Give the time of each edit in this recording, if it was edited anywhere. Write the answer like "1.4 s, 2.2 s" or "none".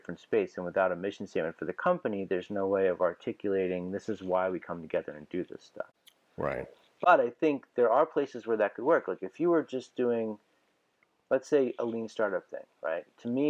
none